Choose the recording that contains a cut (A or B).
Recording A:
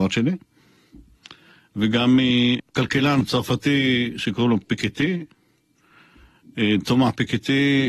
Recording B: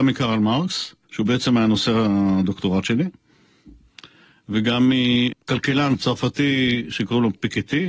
B